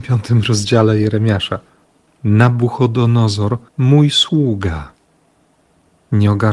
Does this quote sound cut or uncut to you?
uncut